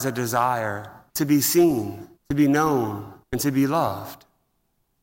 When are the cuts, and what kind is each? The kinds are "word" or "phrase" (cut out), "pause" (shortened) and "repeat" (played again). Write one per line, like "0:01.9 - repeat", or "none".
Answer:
0:01.1 - pause
0:02.2 - pause
0:03.2 - pause